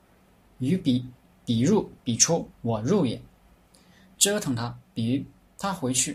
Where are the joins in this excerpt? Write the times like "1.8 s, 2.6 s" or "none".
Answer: 2.0 s, 2.5 s